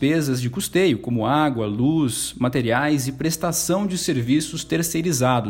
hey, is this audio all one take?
yes; 0 cuts

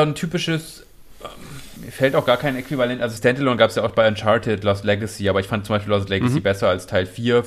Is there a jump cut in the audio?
yes; 2 cuts; at 1.8 s, 3.2 s

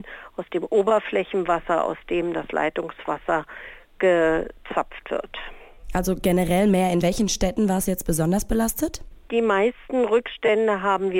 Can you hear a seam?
yes; 1 cut; at 7.0 s

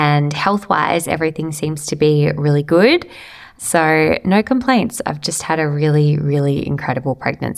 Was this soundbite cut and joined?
no; 0 cuts

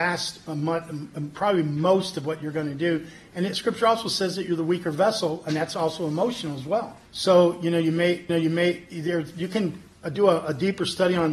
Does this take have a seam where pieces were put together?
yes; 2 cuts; at 7.0 s, 8.3 s

